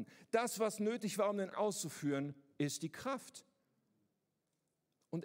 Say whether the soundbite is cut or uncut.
cut